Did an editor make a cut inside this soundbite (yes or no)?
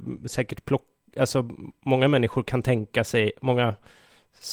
no